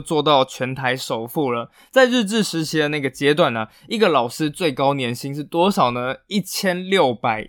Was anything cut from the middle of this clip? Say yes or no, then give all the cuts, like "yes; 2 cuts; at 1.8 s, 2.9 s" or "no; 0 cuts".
no; 0 cuts